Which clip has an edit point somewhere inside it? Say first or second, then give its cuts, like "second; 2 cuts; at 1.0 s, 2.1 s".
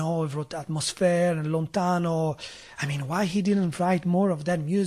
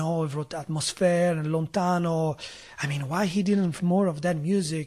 second; 1 cut; at 3.8 s